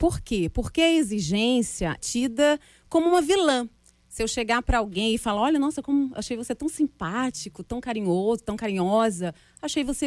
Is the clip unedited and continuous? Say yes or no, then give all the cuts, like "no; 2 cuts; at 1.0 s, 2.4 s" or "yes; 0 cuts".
no; 1 cut; at 2.0 s